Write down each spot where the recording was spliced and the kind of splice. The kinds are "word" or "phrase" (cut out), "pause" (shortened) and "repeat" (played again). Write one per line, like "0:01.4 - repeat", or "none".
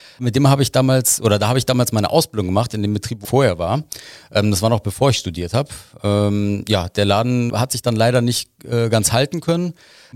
0:03.2 - word
0:07.5 - word